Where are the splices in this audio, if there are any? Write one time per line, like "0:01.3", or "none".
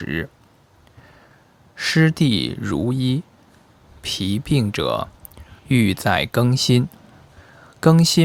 0:05.6